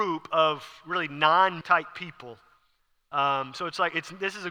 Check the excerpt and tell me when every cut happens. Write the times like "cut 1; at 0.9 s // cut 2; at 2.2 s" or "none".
cut 1; at 1.6 s